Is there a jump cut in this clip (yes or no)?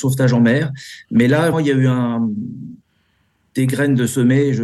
yes